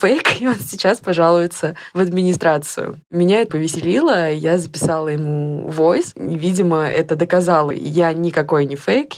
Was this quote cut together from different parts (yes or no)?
yes